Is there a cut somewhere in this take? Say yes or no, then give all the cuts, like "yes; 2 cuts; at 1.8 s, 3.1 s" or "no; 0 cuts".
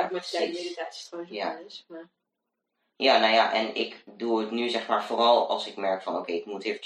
no; 0 cuts